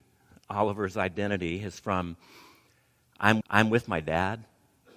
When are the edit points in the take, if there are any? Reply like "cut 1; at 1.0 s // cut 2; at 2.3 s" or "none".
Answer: cut 1; at 1.8 s // cut 2; at 3.4 s